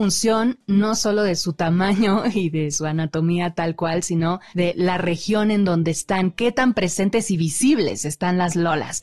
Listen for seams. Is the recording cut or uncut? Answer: uncut